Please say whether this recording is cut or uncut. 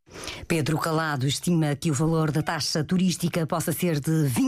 uncut